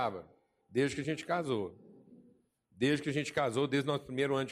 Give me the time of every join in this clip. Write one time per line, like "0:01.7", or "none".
none